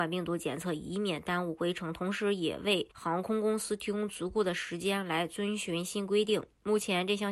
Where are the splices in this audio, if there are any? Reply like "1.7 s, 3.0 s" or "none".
2.9 s